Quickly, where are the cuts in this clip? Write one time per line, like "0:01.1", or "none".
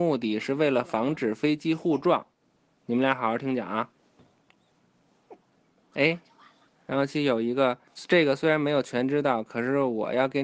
0:02.6
0:07.9